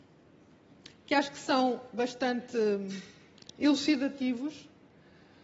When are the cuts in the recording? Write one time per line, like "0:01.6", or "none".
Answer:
none